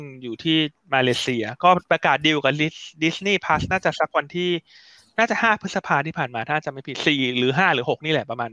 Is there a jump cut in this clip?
no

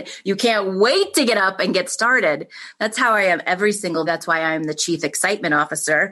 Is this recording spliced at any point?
yes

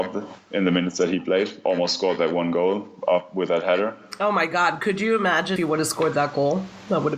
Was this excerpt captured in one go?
no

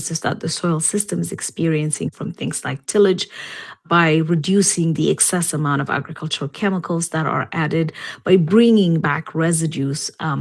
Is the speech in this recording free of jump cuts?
yes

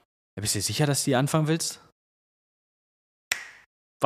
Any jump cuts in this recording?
no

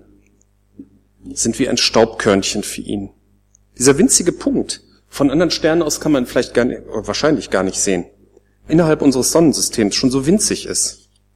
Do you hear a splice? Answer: yes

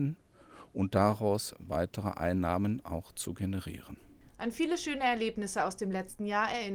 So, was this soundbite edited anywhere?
no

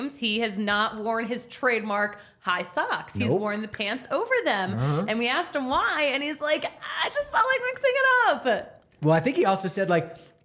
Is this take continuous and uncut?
yes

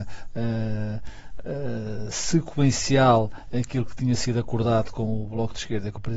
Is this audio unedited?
yes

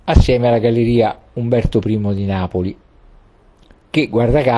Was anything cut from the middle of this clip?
no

